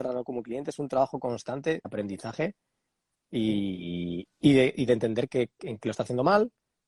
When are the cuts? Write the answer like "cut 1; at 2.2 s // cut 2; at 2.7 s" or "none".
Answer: cut 1; at 1.8 s // cut 2; at 4.3 s // cut 3; at 5.8 s